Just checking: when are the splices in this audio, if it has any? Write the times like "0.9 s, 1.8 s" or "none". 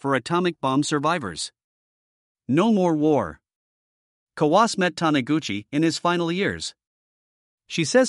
none

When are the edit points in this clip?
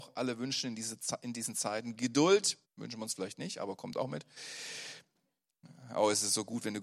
2.6 s

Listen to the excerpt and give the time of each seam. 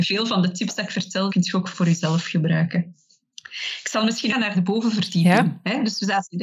4.3 s

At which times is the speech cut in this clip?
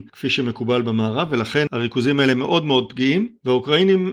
none

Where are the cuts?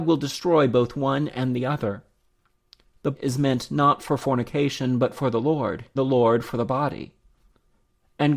3.1 s, 6.0 s

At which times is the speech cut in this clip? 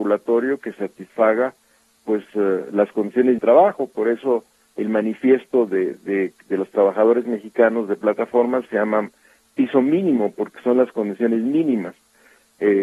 3.4 s

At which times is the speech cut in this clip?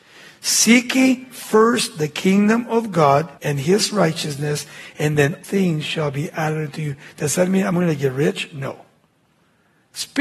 3.4 s, 5.4 s

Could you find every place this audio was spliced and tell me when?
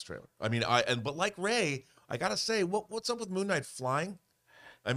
none

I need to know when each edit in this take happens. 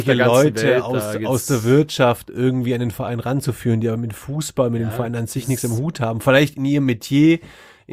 none

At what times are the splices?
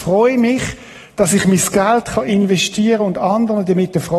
none

